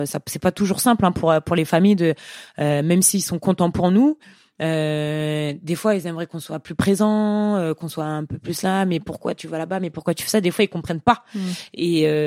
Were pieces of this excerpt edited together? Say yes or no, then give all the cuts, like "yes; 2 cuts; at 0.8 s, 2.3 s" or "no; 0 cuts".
no; 0 cuts